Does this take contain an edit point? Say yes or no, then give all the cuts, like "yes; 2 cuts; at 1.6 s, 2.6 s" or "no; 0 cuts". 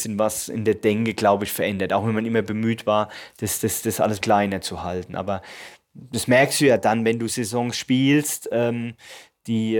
yes; 1 cut; at 4.2 s